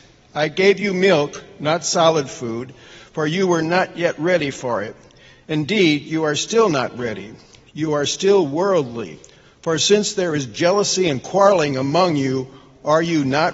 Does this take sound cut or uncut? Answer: uncut